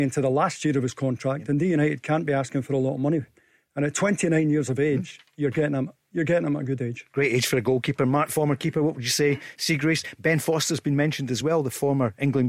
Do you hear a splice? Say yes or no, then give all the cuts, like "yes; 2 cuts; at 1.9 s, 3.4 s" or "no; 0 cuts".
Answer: no; 0 cuts